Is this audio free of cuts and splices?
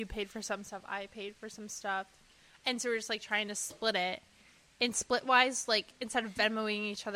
yes; 0 cuts

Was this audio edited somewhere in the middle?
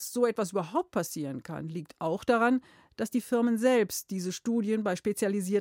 no; 0 cuts

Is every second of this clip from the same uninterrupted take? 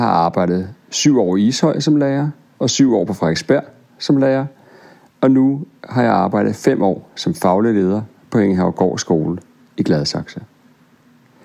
yes; 0 cuts

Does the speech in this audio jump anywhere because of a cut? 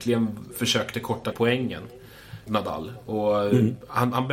yes; 2 cuts; at 1.3 s, 2.5 s

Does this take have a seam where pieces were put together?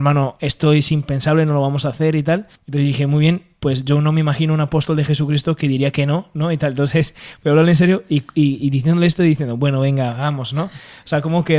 yes; 1 cut; at 2.5 s

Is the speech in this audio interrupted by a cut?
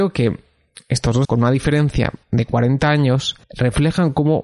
yes; 3 cuts; at 1.2 s, 2.2 s, 3.4 s

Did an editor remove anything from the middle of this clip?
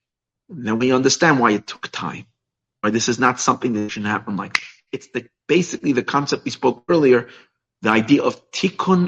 no; 0 cuts

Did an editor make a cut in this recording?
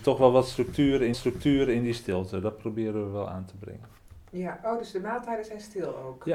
yes; 1 cut; at 1.1 s

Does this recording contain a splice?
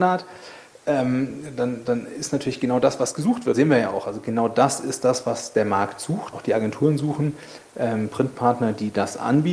yes; 2 cuts; at 3.5 s, 6.3 s

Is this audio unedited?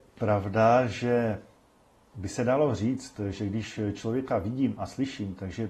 yes; 0 cuts

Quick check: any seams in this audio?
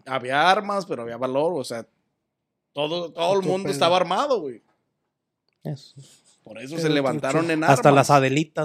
no; 0 cuts

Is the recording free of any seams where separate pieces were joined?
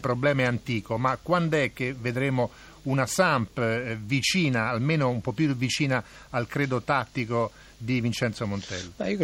yes; 0 cuts

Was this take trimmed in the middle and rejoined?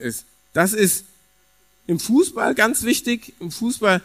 no; 0 cuts

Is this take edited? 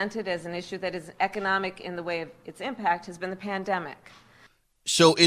no; 0 cuts

